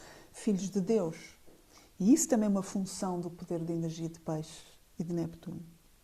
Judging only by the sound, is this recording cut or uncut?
cut